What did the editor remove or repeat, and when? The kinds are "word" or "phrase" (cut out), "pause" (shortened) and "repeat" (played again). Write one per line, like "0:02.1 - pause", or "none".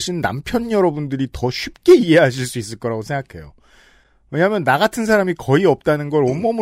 none